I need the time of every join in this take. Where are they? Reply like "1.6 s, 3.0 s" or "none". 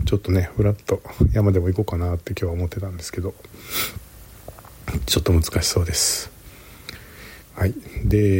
7.4 s